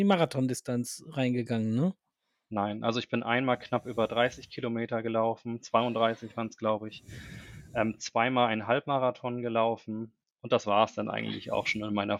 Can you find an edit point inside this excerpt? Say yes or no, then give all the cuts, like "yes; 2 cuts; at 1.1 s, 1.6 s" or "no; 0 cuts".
no; 0 cuts